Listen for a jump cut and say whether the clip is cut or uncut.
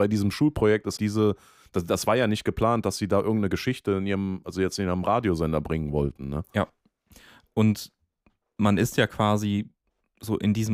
cut